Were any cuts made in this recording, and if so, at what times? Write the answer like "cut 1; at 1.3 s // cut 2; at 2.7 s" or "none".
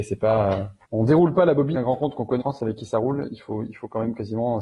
cut 1; at 1.7 s // cut 2; at 2.4 s

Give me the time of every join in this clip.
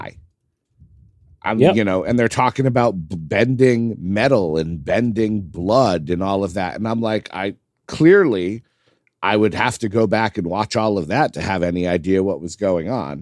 none

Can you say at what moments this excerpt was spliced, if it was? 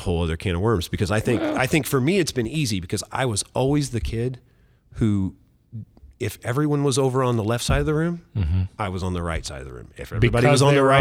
none

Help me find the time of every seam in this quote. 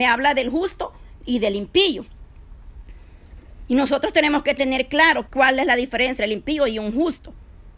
cut 1; at 5.3 s // cut 2; at 6.2 s

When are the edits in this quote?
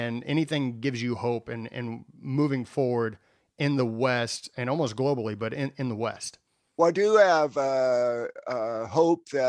none

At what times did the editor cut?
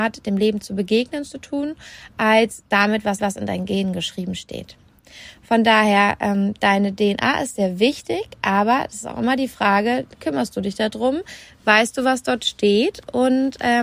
cut 1; at 3.2 s

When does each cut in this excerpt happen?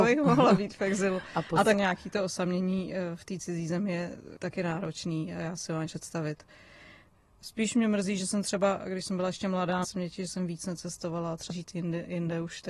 cut 1; at 1.7 s // cut 2; at 4.4 s // cut 3; at 5.9 s // cut 4; at 9.8 s // cut 5; at 11.5 s

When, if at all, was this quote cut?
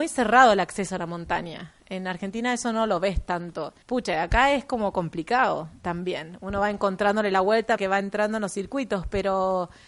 cut 1; at 3.8 s // cut 2; at 7.8 s

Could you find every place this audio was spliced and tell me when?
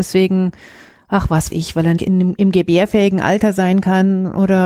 cut 1; at 1.5 s // cut 2; at 2.0 s

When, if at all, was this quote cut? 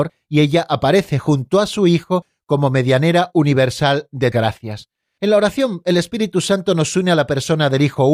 cut 1; at 4.3 s

